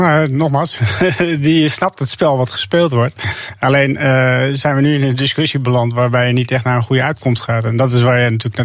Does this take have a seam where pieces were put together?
no; 0 cuts

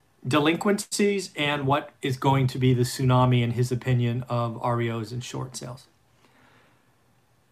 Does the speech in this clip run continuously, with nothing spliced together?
yes; 0 cuts

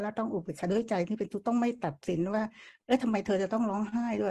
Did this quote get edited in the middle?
no; 0 cuts

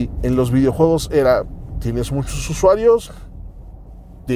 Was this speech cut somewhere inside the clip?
no; 0 cuts

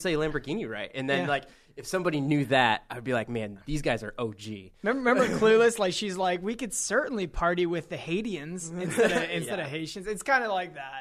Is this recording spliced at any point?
no; 0 cuts

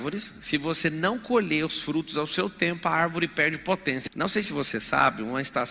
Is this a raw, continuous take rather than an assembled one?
yes; 0 cuts

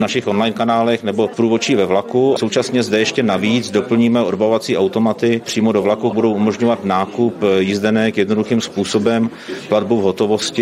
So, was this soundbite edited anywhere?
yes; 3 cuts; at 1.3 s, 2.4 s, 6.1 s

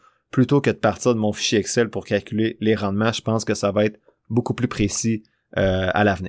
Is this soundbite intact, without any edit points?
yes; 0 cuts

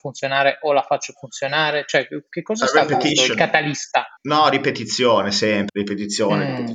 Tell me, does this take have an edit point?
yes; 2 cuts; at 4.2 s, 5.7 s

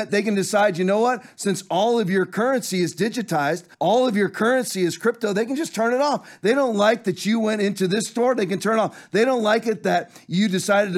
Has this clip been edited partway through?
yes; 1 cut; at 3.7 s

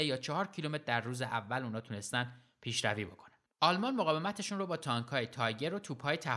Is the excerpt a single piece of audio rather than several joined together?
no; 1 cut; at 3.5 s

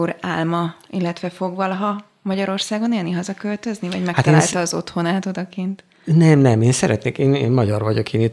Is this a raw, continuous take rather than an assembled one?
yes; 0 cuts

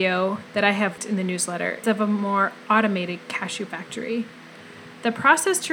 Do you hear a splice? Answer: yes; 3 cuts; at 1.0 s, 1.8 s, 3.7 s

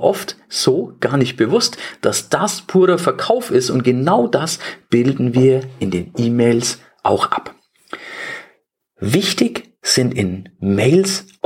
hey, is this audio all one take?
yes; 0 cuts

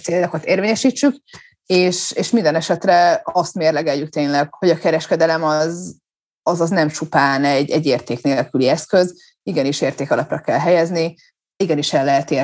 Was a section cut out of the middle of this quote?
no; 0 cuts

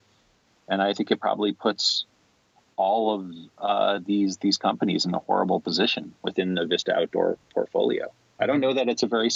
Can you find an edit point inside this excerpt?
no; 0 cuts

